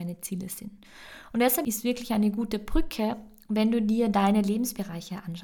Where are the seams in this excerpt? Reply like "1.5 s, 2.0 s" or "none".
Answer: none